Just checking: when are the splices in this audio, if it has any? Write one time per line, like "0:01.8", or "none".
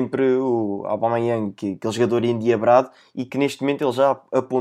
none